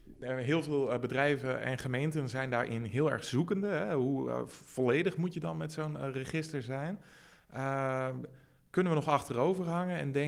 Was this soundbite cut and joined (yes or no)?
no